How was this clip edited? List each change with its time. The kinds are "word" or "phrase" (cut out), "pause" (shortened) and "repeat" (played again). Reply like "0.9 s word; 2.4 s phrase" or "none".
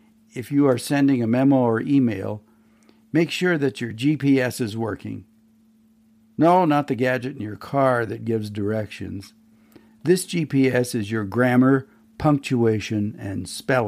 none